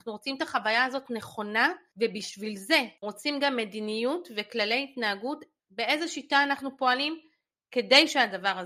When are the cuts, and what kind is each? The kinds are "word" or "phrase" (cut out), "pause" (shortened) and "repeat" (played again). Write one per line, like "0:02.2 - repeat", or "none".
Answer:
0:03.0 - word
0:05.6 - word